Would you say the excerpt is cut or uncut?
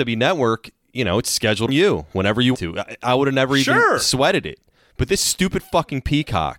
cut